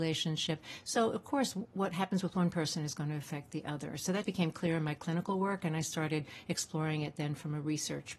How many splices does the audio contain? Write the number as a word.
one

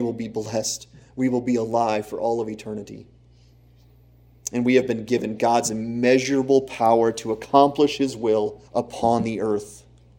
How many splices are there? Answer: one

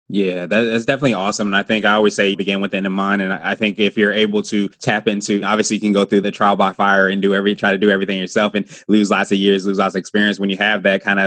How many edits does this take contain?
one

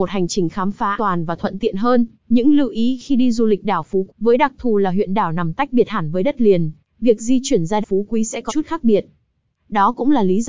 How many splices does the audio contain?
five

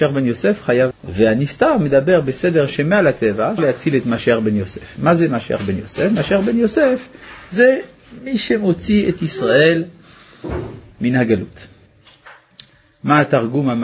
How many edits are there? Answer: two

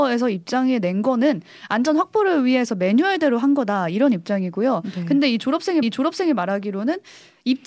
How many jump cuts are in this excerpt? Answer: one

